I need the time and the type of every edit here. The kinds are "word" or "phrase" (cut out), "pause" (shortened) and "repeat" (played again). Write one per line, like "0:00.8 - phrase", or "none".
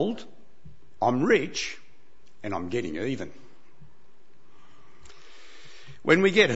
none